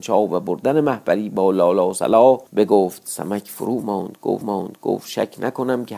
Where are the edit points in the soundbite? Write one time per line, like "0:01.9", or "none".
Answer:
0:02.5
0:04.4

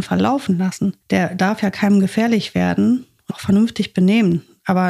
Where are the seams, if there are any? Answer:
0:01.0
0:03.3

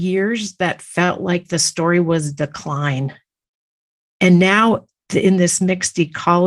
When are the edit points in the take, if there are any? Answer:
none

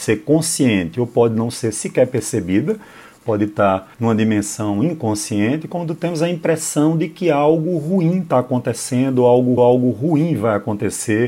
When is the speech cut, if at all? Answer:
0:03.9
0:09.6

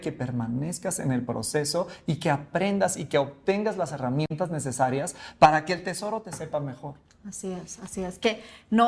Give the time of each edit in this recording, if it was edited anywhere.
0:07.0

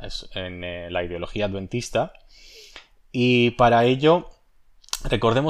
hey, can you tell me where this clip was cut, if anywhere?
none

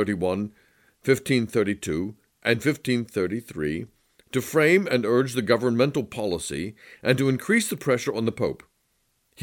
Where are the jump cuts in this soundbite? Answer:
none

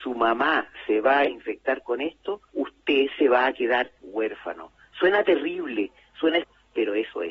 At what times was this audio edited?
0:02.5
0:03.9
0:06.4

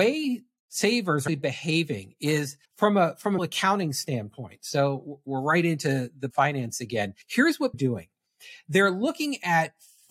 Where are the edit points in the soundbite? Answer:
0:01.3
0:02.6
0:03.4
0:06.3
0:07.2
0:07.7

